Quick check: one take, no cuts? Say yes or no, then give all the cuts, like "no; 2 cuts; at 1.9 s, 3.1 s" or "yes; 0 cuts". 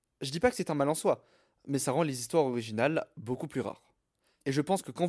yes; 0 cuts